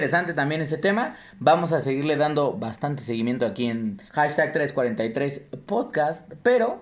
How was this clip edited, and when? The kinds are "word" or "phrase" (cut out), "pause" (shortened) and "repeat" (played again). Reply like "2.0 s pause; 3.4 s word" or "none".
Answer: 4.1 s pause